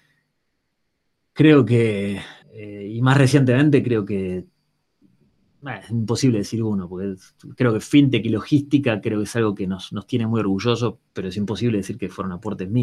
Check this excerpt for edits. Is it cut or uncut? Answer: cut